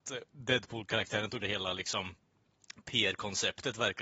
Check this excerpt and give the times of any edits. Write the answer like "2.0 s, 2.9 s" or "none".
1.4 s